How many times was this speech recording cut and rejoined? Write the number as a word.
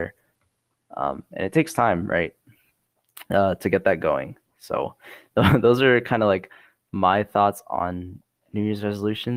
one